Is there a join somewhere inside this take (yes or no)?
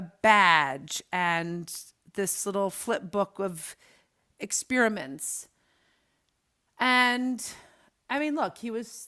no